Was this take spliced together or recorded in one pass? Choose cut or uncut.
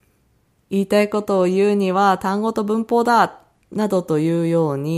uncut